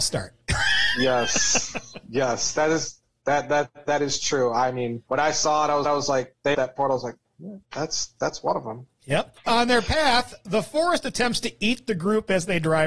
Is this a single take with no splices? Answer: no; 4 cuts; at 5.1 s, 5.8 s, 6.5 s, 7.6 s

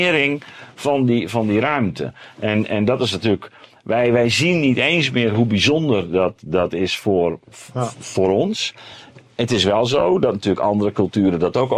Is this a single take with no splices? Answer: yes; 0 cuts

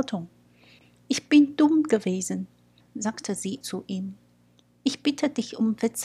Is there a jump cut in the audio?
yes; 1 cut; at 3.6 s

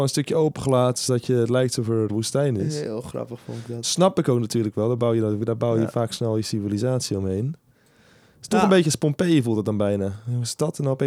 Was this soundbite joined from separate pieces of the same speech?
yes; 1 cut; at 2.1 s

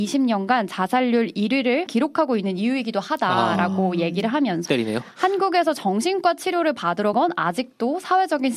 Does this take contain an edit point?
yes; 3 cuts; at 1.9 s, 4.7 s, 7.1 s

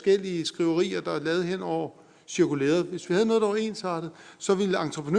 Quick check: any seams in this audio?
no; 0 cuts

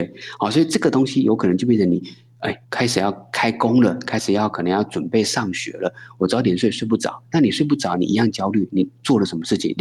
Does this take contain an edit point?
yes; 1 cut; at 2.6 s

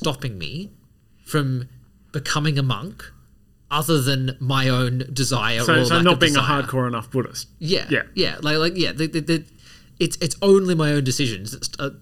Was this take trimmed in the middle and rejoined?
no; 0 cuts

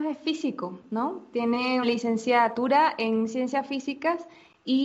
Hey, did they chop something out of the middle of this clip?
yes; 1 cut; at 1.8 s

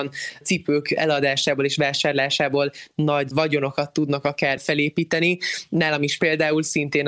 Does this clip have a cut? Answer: no; 0 cuts

